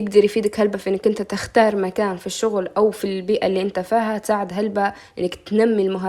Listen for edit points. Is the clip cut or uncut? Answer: uncut